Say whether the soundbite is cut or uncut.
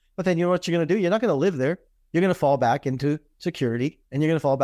uncut